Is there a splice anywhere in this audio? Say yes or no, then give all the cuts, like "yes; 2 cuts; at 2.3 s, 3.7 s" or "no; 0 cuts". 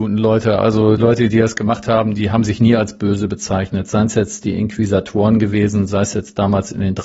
yes; 1 cut; at 1.0 s